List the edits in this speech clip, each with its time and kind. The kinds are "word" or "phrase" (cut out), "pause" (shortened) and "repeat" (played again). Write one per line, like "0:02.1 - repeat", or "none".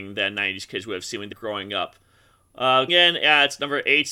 0:01.3 - word
0:02.9 - word